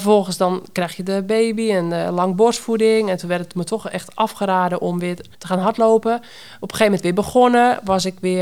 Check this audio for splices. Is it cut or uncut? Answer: cut